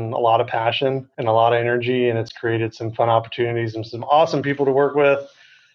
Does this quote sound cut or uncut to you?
uncut